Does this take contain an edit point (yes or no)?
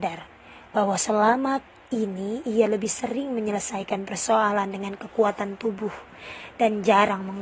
no